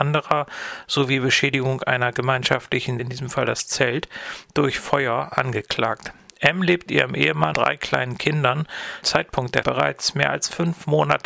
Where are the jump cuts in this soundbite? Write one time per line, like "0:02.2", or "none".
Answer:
0:03.0
0:06.9
0:07.5
0:09.0
0:09.6